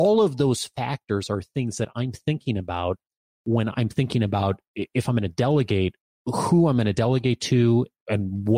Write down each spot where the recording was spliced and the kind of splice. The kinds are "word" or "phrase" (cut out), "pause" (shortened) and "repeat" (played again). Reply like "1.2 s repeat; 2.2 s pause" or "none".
none